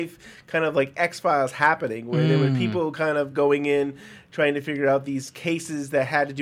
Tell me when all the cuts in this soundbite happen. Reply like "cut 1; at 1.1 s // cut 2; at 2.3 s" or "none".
none